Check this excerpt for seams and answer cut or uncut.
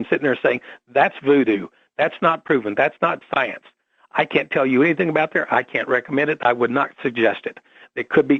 uncut